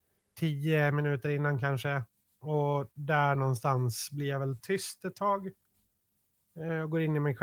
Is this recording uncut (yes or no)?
yes